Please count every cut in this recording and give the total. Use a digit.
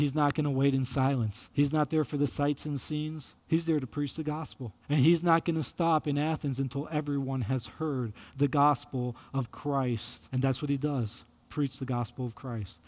4